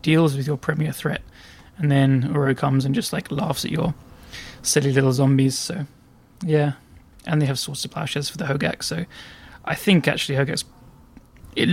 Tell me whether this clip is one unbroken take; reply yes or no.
yes